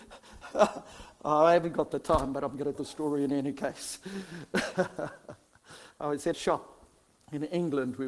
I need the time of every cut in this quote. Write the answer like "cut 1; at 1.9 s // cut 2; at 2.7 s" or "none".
cut 1; at 2.7 s // cut 2; at 6.3 s

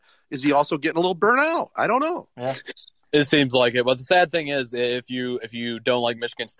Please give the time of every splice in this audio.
cut 1; at 2.3 s

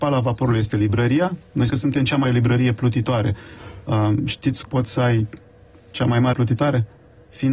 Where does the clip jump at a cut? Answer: cut 1; at 1.7 s // cut 2; at 2.2 s // cut 3; at 4.7 s // cut 4; at 6.3 s

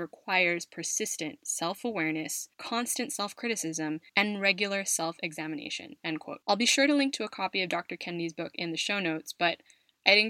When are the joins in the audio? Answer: cut 1; at 2.5 s // cut 2; at 4.1 s // cut 3; at 6.4 s

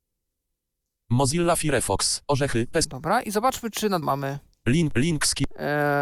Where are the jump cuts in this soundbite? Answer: cut 1; at 4.0 s

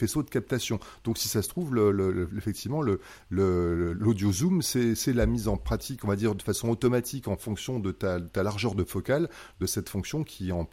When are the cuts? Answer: none

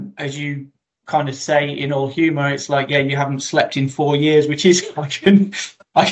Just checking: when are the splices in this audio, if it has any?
none

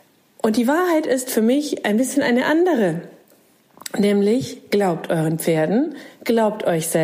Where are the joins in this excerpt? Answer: none

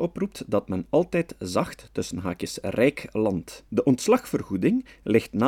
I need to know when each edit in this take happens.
cut 1; at 3.7 s

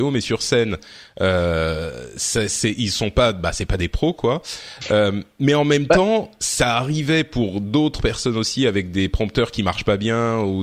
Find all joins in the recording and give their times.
none

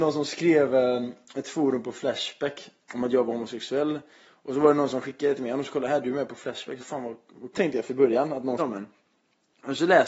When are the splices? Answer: cut 1; at 6.8 s // cut 2; at 7.5 s // cut 3; at 7.9 s // cut 4; at 8.6 s

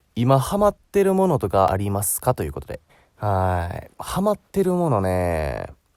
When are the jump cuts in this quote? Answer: cut 1; at 2.9 s // cut 2; at 3.9 s // cut 3; at 4.5 s

